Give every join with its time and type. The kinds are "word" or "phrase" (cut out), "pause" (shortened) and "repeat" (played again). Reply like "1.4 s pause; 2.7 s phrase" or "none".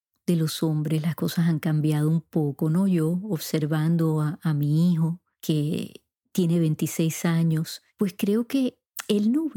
none